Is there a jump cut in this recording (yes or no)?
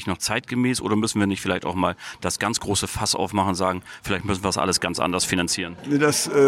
no